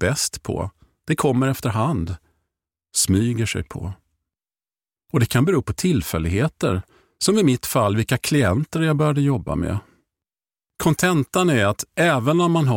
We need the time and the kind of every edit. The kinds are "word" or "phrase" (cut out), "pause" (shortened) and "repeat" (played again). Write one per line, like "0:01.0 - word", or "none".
none